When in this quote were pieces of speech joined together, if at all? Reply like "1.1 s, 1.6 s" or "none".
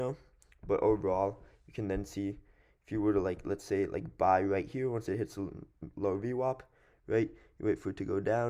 none